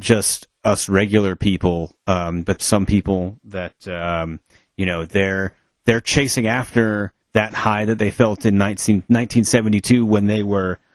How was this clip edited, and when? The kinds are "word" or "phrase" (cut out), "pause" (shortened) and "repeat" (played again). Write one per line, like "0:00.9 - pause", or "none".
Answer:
0:02.6 - phrase
0:07.2 - pause